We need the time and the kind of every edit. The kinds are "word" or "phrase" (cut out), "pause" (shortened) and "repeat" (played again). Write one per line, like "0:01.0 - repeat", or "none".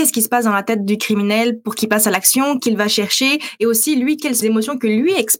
0:02.6 - word
0:04.4 - word